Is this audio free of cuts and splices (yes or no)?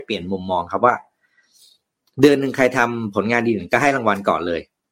yes